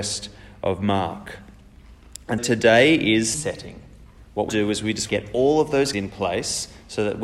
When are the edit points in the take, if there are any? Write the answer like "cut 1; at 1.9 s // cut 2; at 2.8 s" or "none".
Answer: cut 1; at 2.4 s // cut 2; at 3.3 s // cut 3; at 4.5 s // cut 4; at 5.1 s // cut 5; at 5.9 s